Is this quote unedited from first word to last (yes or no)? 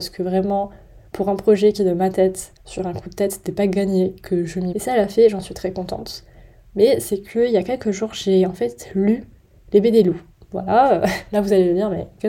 no